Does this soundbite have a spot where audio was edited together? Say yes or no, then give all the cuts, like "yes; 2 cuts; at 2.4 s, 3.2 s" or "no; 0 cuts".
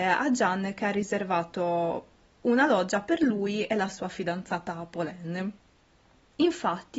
no; 0 cuts